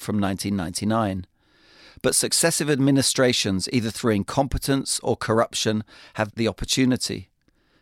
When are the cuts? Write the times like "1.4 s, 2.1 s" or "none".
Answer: 6.3 s